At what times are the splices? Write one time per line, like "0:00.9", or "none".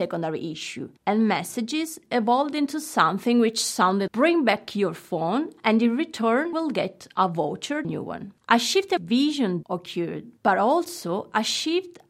0:01.0
0:04.1
0:06.5
0:07.8
0:09.0
0:09.6
0:10.4